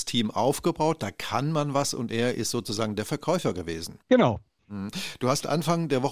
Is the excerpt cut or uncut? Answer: cut